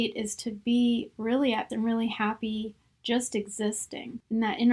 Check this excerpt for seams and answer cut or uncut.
cut